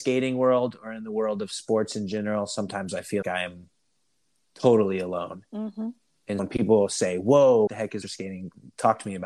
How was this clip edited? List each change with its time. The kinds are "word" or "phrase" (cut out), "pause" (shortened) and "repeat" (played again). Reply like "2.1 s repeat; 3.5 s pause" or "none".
3.2 s word; 6.4 s word; 7.7 s word; 8.0 s word